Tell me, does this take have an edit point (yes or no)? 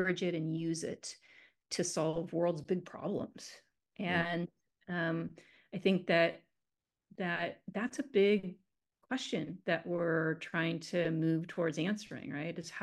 no